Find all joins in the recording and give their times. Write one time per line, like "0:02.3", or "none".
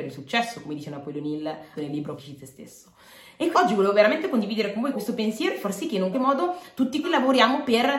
0:01.7
0:02.2
0:03.5
0:04.9
0:06.1
0:07.0